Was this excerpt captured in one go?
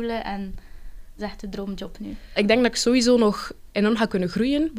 no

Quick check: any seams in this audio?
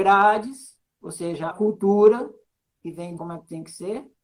yes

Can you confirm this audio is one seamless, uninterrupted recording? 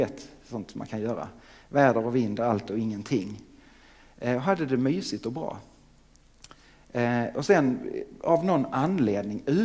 yes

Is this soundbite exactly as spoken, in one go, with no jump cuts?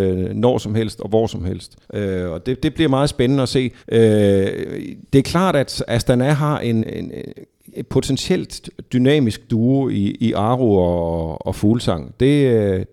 no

